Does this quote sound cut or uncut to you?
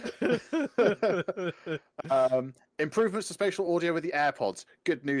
uncut